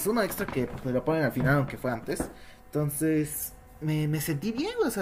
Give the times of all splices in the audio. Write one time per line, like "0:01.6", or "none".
none